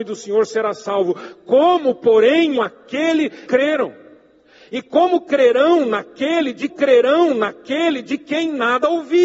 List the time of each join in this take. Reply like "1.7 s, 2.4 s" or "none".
2.6 s, 3.5 s, 6.7 s